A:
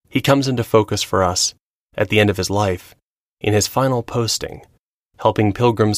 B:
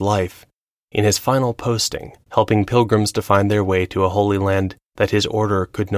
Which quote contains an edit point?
B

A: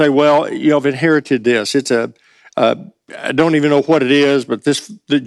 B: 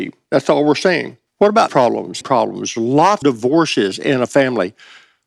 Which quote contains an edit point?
B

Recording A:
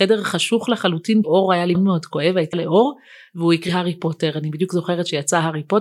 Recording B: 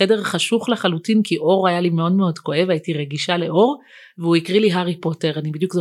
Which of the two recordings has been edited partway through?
A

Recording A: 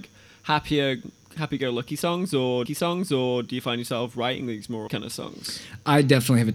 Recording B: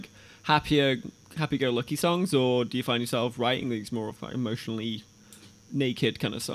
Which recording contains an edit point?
A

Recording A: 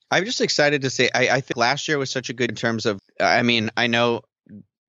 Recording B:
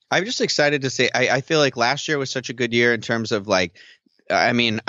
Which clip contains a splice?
A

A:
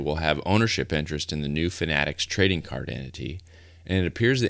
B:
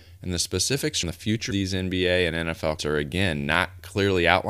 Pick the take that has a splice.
B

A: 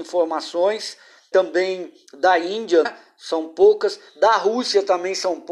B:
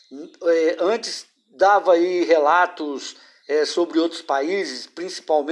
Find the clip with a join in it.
A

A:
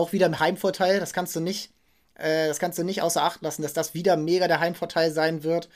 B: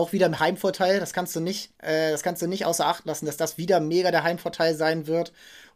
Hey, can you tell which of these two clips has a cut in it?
B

